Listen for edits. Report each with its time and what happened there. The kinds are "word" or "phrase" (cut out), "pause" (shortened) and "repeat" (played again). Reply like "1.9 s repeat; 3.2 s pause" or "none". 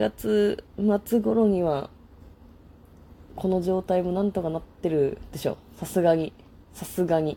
none